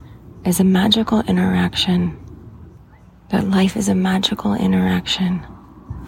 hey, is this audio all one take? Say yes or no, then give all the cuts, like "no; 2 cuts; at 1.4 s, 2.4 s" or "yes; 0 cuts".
yes; 0 cuts